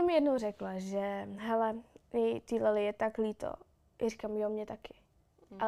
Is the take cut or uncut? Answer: uncut